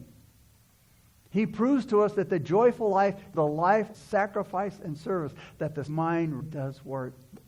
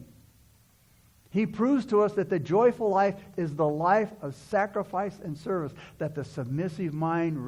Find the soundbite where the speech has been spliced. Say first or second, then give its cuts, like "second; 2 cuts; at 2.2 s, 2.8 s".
first; 4 cuts; at 3.3 s, 3.9 s, 5.9 s, 6.4 s